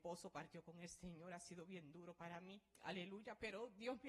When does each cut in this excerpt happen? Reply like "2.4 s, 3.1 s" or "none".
2.7 s